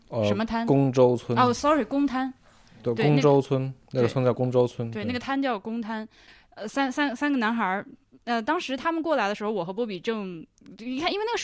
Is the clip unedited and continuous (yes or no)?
yes